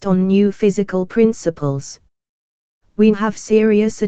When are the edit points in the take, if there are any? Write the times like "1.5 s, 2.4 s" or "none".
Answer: 3.1 s